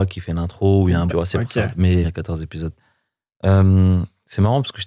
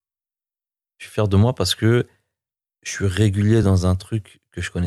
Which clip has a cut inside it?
first; 2 cuts; at 1.1 s, 2.0 s

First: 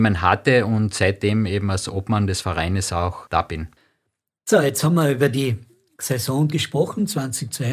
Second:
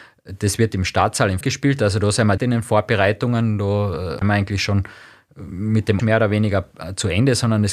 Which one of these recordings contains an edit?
second; 4 cuts; at 1.4 s, 2.4 s, 4.2 s, 6.0 s

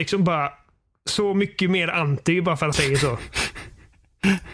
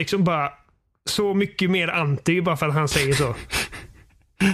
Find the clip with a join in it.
first; 1 cut; at 2.7 s

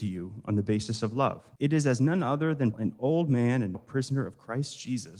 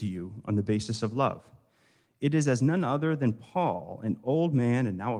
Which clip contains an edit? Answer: first; 3 cuts; at 1.6 s, 2.7 s, 3.7 s

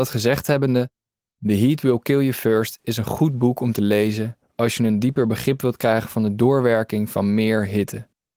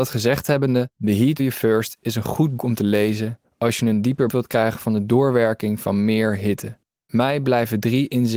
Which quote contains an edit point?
second; 5 cuts; at 1.0 s, 1.4 s, 2.6 s, 4.3 s, 7.0 s

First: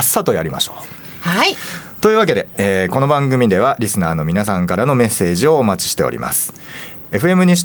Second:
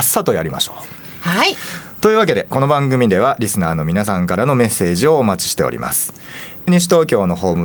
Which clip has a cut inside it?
second; 2 cuts; at 2.5 s, 6.7 s

